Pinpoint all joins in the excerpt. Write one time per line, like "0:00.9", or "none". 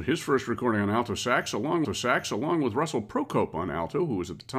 0:01.8